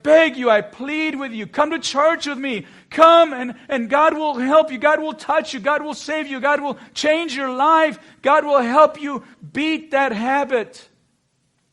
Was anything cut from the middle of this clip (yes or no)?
no